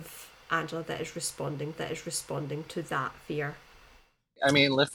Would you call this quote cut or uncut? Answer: cut